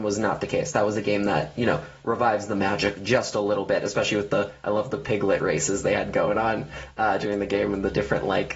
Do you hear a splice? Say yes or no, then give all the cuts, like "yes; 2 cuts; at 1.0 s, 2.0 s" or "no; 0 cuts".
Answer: no; 0 cuts